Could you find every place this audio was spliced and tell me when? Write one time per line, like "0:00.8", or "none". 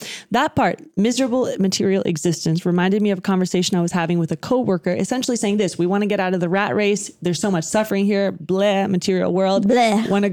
none